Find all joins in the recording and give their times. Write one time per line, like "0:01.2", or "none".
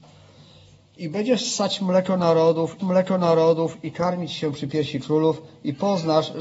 0:02.8